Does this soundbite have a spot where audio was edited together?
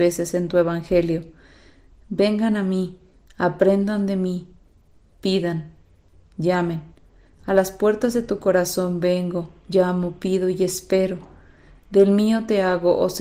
no; 0 cuts

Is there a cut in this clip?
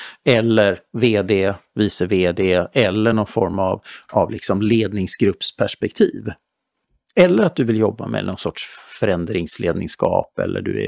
no; 0 cuts

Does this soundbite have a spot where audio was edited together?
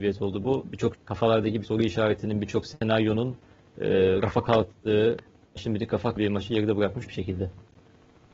yes; 5 cuts; at 0.9 s, 1.6 s, 5.6 s, 6.2 s, 7.0 s

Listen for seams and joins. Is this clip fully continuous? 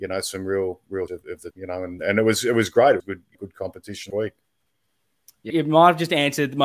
no; 7 cuts; at 1.1 s, 1.5 s, 2.0 s, 3.0 s, 3.3 s, 4.1 s, 5.5 s

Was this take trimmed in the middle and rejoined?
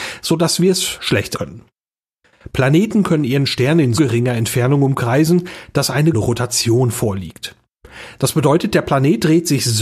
yes; 3 cuts; at 1.3 s, 4.0 s, 6.1 s

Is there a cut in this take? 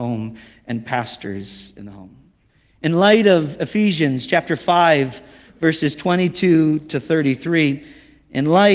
no; 0 cuts

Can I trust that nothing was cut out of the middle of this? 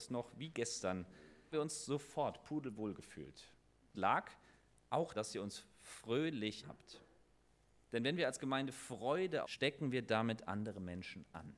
no; 5 cuts; at 1.5 s, 3.9 s, 5.1 s, 6.6 s, 9.4 s

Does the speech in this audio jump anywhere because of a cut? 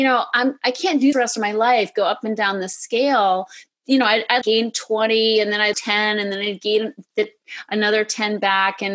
yes; 3 cuts; at 1.1 s, 4.4 s, 5.7 s

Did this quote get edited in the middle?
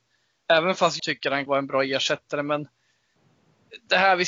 yes; 2 cuts; at 1.0 s, 1.5 s

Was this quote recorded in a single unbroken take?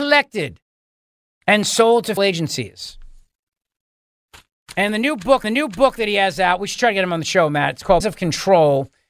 no; 3 cuts; at 2.2 s, 5.4 s, 8.0 s

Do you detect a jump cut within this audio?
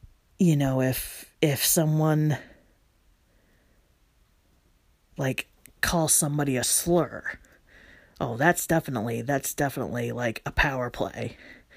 no; 0 cuts

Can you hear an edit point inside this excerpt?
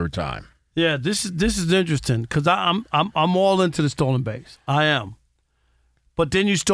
no; 0 cuts

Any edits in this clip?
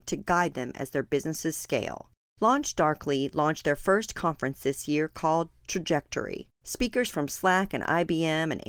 yes; 1 cut; at 6.5 s

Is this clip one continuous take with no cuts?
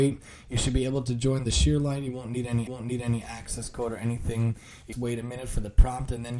no; 2 cuts; at 2.7 s, 4.9 s

